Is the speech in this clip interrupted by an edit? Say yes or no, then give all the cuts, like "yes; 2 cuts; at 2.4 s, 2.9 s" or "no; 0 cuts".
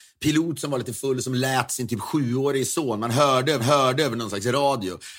yes; 1 cut; at 3.6 s